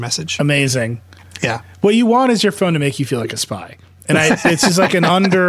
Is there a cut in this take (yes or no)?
no